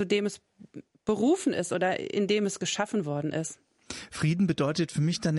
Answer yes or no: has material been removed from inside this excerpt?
no